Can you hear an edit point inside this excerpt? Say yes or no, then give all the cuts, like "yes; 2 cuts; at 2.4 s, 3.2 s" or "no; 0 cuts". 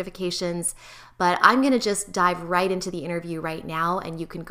no; 0 cuts